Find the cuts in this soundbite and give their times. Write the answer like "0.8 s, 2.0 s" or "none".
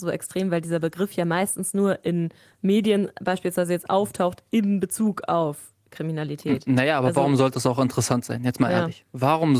none